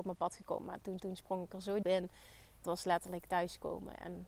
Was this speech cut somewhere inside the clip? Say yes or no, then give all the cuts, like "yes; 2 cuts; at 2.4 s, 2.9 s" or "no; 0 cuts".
yes; 3 cuts; at 1.0 s, 1.8 s, 2.6 s